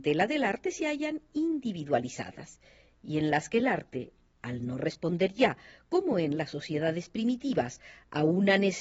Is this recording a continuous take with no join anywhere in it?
yes; 0 cuts

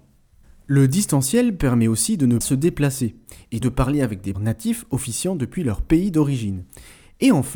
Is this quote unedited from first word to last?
no; 3 cuts; at 2.4 s, 3.6 s, 4.3 s

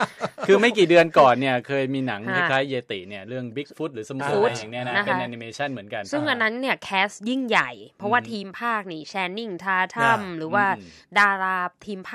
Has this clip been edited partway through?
yes; 1 cut; at 4.2 s

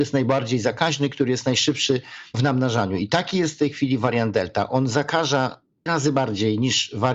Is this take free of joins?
no; 1 cut; at 5.9 s

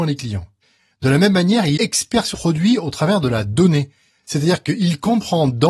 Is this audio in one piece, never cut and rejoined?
no; 2 cuts; at 1.8 s, 2.3 s

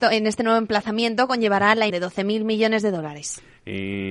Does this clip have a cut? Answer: yes; 1 cut; at 1.9 s

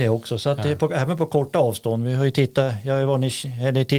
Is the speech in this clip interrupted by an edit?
no; 0 cuts

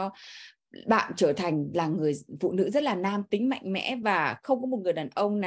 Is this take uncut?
yes; 0 cuts

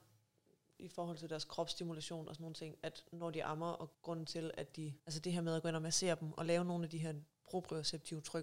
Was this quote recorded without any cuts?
no; 2 cuts; at 3.9 s, 5.0 s

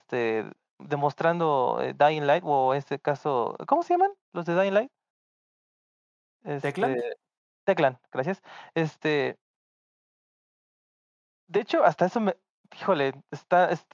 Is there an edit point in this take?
no; 0 cuts

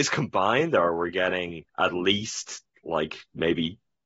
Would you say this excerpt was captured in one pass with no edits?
no; 2 cuts; at 1.7 s, 2.7 s

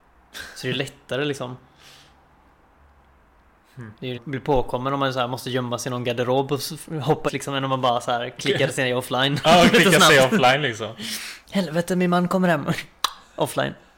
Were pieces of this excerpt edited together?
yes; 3 cuts; at 4.1 s, 7.3 s, 11.4 s

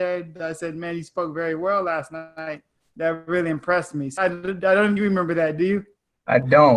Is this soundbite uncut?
no; 2 cuts; at 4.2 s, 5.0 s

